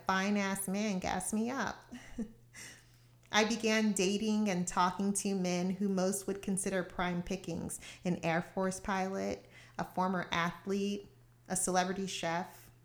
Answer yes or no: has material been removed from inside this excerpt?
no